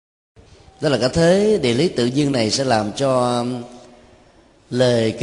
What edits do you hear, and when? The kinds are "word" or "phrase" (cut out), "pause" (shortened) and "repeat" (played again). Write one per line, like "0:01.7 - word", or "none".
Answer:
none